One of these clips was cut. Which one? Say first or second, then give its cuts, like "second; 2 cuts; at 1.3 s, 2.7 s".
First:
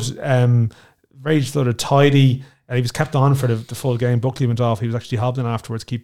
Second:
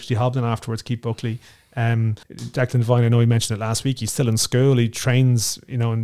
second; 1 cut; at 2.2 s